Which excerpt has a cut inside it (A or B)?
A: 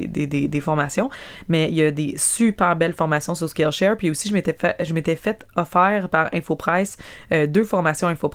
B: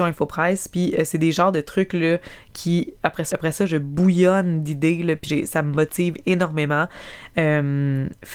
B